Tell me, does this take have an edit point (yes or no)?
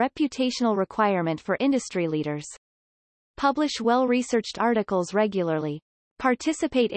no